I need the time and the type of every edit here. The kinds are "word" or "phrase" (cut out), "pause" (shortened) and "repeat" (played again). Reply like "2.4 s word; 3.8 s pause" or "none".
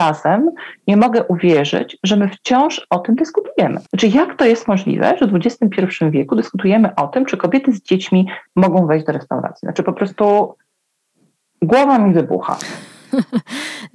3.9 s pause